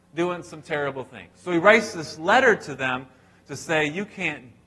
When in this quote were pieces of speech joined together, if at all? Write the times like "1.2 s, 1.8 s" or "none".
none

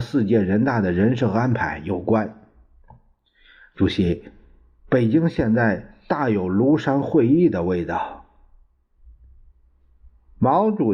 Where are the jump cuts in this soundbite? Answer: none

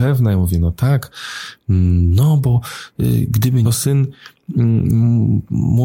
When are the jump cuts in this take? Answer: 3.6 s

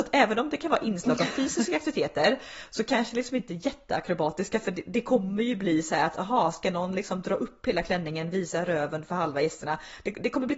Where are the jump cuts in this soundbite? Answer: none

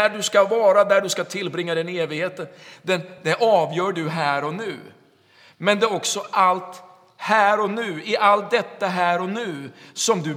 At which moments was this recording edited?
none

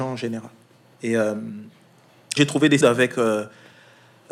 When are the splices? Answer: 2.4 s, 2.8 s

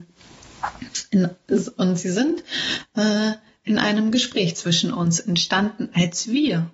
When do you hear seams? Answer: none

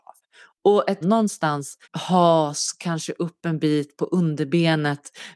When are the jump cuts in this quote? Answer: 1.0 s, 1.8 s

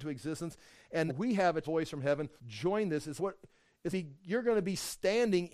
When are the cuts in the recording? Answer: 1.1 s, 1.6 s, 2.4 s, 3.2 s, 3.9 s

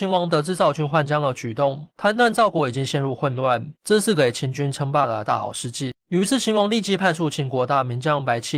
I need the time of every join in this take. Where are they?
1.9 s, 3.8 s, 6.0 s

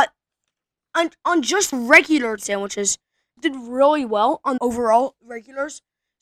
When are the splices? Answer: 1.7 s, 2.4 s, 3.4 s, 4.6 s

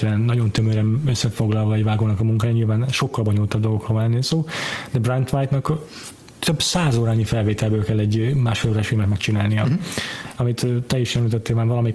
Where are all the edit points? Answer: none

